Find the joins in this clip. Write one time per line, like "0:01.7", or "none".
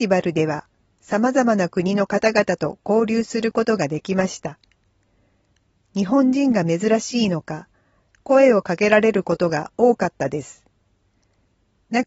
none